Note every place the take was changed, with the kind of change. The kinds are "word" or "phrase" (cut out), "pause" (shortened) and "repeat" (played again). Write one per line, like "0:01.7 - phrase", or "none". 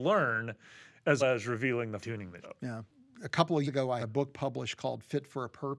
0:01.2 - word
0:02.0 - word
0:02.4 - word
0:03.6 - word
0:04.0 - word